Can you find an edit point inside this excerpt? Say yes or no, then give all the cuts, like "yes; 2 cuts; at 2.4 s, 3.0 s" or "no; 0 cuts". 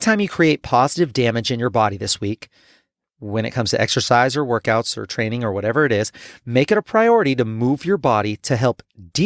no; 0 cuts